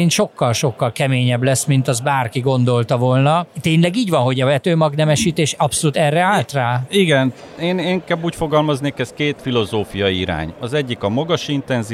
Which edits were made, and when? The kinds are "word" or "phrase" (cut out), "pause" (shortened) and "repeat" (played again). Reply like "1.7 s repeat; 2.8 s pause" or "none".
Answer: none